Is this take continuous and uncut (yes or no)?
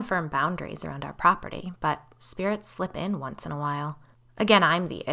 no